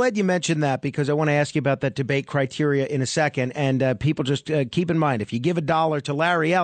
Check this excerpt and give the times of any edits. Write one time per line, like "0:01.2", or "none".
none